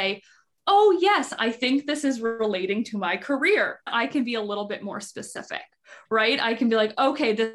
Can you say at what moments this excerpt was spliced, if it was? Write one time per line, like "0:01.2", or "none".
0:03.9